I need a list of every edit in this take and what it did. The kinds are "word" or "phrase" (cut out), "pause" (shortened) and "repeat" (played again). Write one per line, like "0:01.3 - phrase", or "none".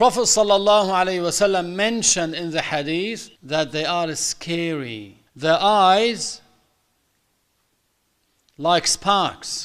0:03.4 - pause
0:05.3 - pause